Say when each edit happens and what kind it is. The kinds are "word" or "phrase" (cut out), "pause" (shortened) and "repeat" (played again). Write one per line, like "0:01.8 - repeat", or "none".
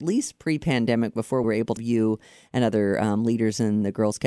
0:01.4 - word
0:01.8 - word